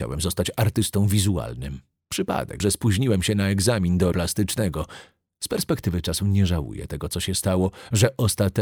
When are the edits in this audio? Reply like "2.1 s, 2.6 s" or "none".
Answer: 2.6 s, 4.1 s